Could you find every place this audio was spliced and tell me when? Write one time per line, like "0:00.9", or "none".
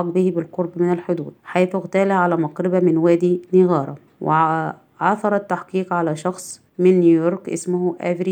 0:01.4
0:04.1
0:06.7